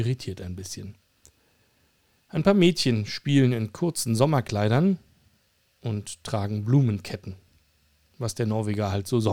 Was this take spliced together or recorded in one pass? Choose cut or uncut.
uncut